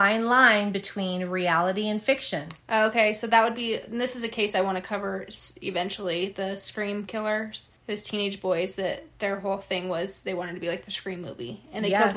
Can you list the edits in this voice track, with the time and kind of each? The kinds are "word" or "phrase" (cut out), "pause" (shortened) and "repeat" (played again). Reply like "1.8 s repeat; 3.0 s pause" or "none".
7.8 s pause